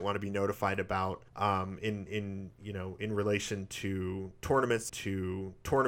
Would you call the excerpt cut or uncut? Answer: cut